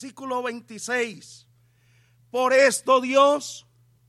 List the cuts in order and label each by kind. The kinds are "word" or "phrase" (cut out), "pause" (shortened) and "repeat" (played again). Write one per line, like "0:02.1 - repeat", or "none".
none